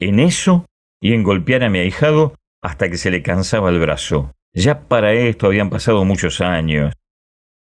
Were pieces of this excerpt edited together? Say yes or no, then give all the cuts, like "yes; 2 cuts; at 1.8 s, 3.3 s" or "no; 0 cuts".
yes; 1 cut; at 4.4 s